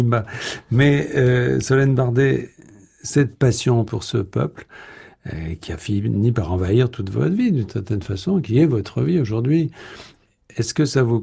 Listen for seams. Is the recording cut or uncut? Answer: uncut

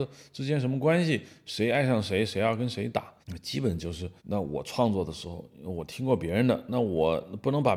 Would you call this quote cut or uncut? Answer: cut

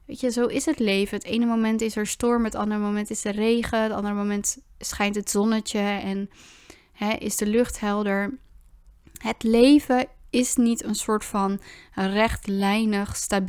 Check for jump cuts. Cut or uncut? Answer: uncut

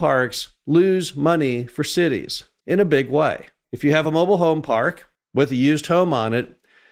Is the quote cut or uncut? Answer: uncut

